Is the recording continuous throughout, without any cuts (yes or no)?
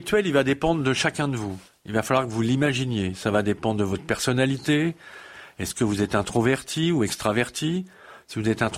no